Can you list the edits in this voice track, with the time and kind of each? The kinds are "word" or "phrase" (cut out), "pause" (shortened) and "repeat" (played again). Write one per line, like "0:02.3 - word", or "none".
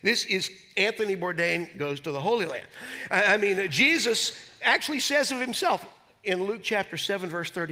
none